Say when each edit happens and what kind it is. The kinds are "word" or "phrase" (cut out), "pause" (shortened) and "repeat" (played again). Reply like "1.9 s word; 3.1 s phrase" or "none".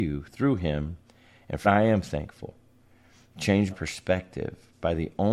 1.6 s word; 3.7 s word